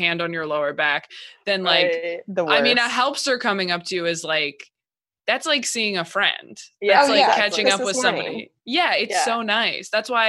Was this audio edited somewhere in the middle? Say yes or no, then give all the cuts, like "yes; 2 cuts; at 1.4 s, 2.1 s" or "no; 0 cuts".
no; 0 cuts